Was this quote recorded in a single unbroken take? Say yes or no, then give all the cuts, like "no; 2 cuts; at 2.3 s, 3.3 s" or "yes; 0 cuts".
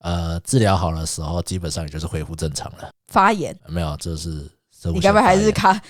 no; 1 cut; at 3.6 s